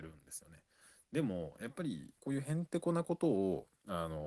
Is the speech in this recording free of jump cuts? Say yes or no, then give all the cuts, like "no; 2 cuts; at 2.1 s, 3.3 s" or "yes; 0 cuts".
no; 1 cut; at 2.2 s